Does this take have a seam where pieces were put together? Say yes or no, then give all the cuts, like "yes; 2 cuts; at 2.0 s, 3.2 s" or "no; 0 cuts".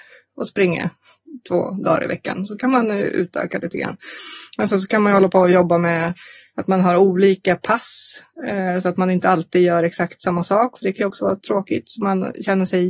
no; 0 cuts